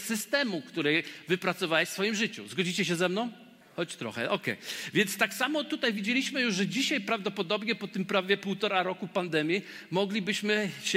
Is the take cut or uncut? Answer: cut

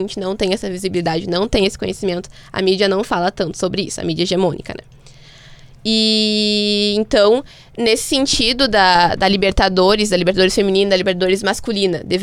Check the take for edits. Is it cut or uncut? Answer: uncut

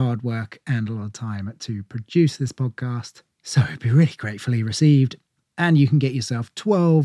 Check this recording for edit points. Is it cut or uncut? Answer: uncut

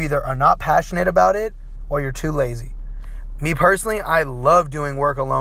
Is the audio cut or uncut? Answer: uncut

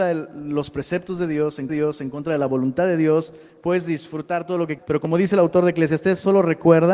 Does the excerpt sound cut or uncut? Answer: cut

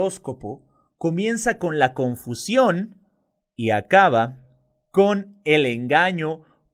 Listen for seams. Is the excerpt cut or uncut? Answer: uncut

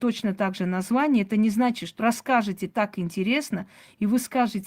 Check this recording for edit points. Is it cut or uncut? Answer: cut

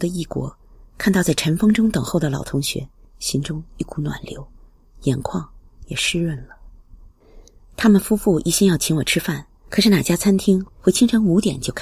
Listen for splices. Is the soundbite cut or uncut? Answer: uncut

